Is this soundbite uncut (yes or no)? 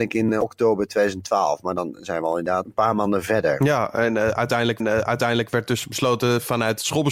no